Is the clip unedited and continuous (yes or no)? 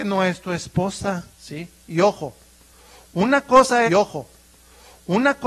no